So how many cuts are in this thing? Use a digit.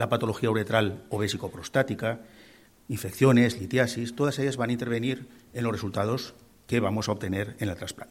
0